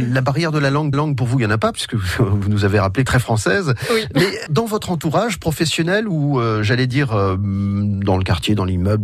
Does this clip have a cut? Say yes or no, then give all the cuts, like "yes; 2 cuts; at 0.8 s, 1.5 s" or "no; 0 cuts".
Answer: yes; 3 cuts; at 0.9 s, 3.1 s, 4.5 s